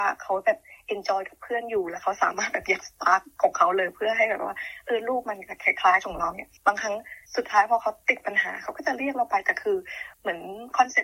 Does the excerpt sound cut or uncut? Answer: cut